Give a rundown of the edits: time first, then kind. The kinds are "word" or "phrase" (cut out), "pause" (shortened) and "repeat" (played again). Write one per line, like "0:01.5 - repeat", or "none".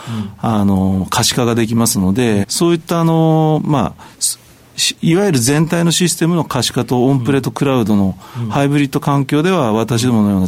0:02.4 - phrase